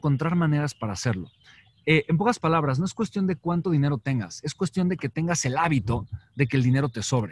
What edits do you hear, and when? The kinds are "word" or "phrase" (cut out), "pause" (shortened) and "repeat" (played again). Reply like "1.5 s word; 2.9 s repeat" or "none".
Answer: none